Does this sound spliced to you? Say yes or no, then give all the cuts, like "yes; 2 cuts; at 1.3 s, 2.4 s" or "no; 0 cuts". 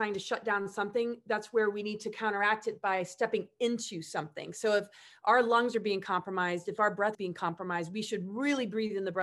yes; 1 cut; at 7.1 s